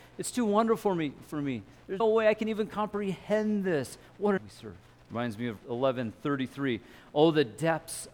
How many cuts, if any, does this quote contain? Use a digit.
4